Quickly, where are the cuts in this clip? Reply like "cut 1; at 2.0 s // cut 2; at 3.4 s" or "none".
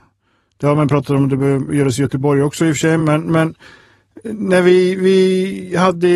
none